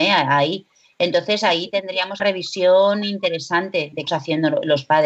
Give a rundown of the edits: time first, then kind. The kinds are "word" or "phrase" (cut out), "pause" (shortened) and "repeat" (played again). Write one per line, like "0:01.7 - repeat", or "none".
0:02.2 - phrase
0:04.1 - word